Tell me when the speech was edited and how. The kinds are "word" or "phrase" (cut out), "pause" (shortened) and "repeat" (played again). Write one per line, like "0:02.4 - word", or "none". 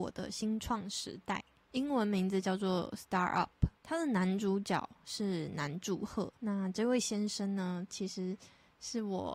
0:01.6 - pause
0:03.8 - pause
0:06.3 - pause

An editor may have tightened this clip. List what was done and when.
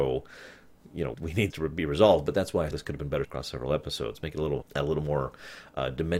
0:01.1 - word
0:01.5 - word
0:02.7 - word
0:03.2 - word
0:04.6 - word

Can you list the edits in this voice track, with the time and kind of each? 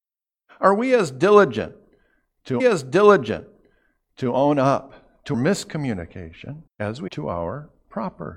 0:02.6 - repeat
0:05.3 - word
0:06.7 - pause
0:07.1 - word

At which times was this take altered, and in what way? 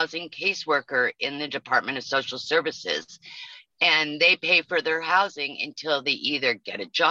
none

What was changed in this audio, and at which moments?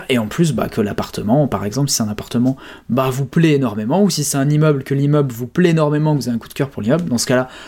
none

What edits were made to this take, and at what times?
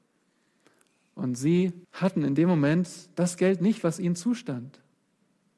0:01.8 - pause

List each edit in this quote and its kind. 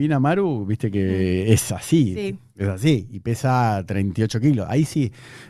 none

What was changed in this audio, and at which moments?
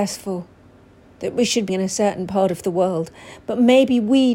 0:01.7 - word

